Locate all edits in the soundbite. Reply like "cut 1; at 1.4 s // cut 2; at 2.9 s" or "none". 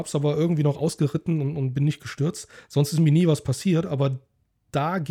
none